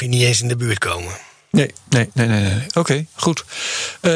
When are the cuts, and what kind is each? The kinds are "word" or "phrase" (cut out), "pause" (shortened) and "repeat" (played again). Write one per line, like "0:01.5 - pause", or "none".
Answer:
none